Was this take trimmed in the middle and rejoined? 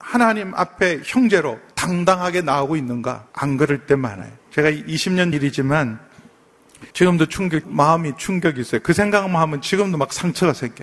yes; 6 cuts; at 1.7 s, 3.3 s, 4.4 s, 5.3 s, 6.9 s, 7.6 s

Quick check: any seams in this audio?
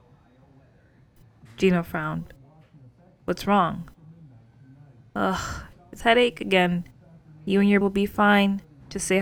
yes; 2 cuts; at 6.0 s, 7.8 s

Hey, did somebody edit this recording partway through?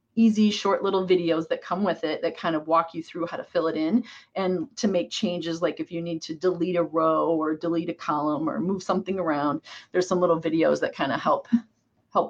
no; 0 cuts

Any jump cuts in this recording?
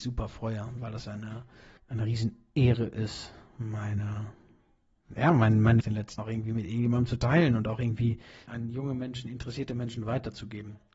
yes; 4 cuts; at 1.8 s, 5.8 s, 6.2 s, 8.5 s

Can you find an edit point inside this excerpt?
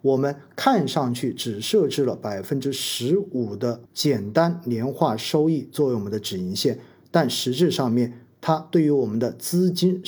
yes; 1 cut; at 3.9 s

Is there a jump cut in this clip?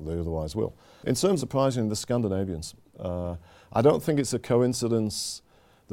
yes; 1 cut; at 1.4 s

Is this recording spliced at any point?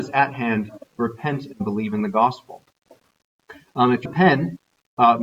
yes; 1 cut; at 4.1 s

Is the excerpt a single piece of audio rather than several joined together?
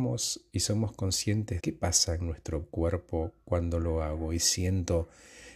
no; 1 cut; at 1.6 s

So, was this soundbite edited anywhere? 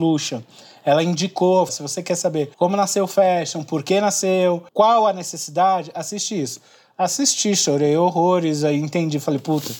yes; 3 cuts; at 1.7 s, 2.5 s, 4.7 s

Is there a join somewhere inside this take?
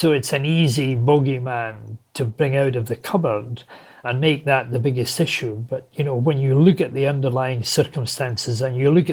no; 0 cuts

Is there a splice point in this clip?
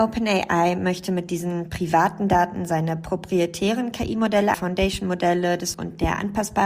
yes; 2 cuts; at 4.5 s, 5.7 s

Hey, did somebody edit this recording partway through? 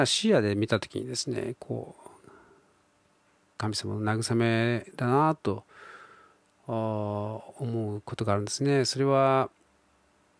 no; 0 cuts

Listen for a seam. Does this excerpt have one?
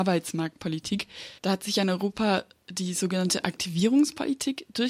yes; 1 cut; at 1.4 s

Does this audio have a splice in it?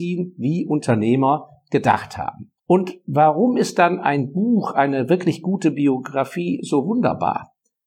yes; 1 cut; at 2.6 s

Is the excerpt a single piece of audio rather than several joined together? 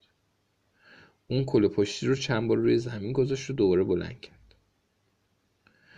yes; 0 cuts

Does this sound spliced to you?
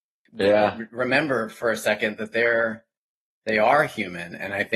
no; 0 cuts

